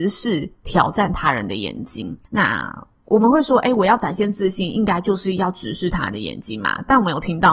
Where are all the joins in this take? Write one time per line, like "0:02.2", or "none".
0:02.3